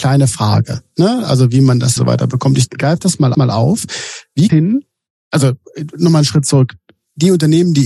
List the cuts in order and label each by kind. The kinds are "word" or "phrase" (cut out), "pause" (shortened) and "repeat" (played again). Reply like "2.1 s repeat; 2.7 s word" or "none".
2.0 s phrase; 3.3 s repeat; 4.5 s phrase